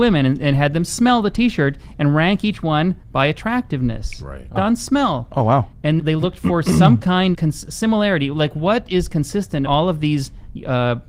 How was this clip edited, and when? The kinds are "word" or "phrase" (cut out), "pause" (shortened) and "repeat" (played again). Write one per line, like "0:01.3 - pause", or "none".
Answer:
0:04.6 - word
0:06.0 - word
0:07.3 - word
0:09.7 - word